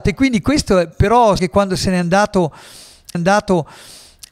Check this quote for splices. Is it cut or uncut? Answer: cut